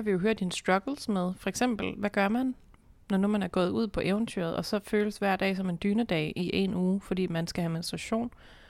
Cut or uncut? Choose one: uncut